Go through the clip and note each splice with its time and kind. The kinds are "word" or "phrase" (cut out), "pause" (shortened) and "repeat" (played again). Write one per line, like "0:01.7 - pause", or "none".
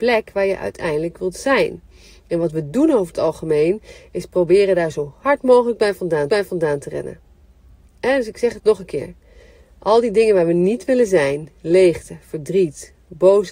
0:06.3 - repeat
0:07.6 - pause